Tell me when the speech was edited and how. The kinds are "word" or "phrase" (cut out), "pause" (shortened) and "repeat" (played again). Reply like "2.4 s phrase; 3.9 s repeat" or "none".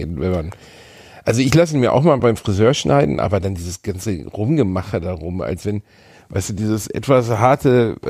none